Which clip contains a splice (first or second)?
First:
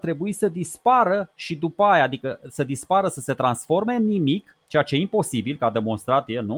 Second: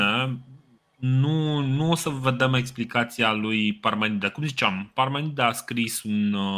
first